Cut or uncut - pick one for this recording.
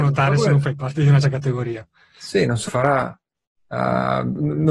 cut